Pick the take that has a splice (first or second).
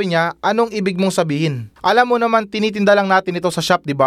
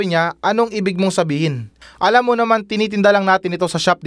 first